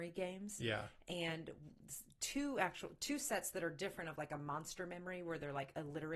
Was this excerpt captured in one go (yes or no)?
yes